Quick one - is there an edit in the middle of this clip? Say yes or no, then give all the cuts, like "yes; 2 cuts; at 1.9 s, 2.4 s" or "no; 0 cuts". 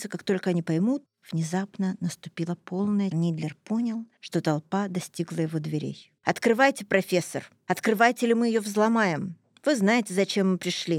yes; 2 cuts; at 3.1 s, 6.2 s